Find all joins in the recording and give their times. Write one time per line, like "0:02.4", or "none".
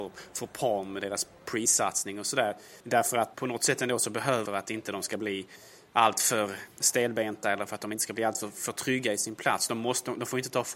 0:02.8
0:03.3
0:04.5
0:06.8